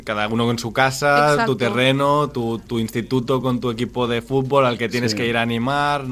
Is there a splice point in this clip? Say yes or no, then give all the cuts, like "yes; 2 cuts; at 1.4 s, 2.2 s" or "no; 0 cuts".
no; 0 cuts